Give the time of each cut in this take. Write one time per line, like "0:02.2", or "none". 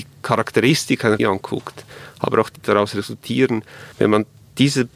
0:01.2
0:02.6
0:03.9

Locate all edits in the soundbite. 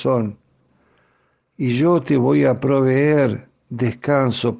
none

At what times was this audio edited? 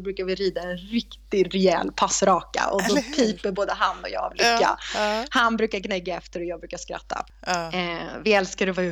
none

